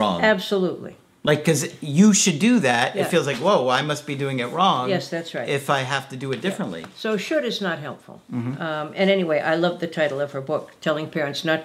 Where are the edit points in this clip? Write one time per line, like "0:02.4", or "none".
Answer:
none